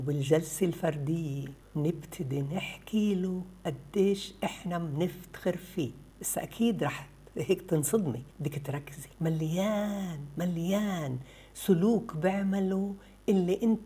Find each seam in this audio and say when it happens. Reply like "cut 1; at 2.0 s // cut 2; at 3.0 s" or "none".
cut 1; at 1.6 s // cut 2; at 6.1 s // cut 3; at 8.3 s // cut 4; at 9.1 s